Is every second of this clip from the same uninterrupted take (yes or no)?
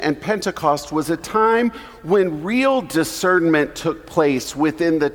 yes